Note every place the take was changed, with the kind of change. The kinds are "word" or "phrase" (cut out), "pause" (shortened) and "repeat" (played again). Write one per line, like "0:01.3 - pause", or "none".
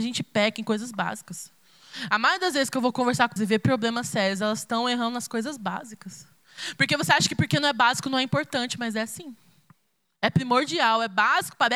0:03.4 - word